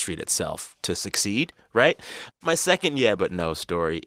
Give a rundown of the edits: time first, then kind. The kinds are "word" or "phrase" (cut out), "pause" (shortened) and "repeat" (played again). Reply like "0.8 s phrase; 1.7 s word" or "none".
none